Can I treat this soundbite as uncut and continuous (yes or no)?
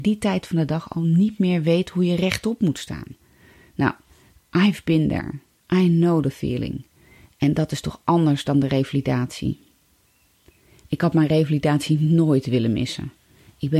yes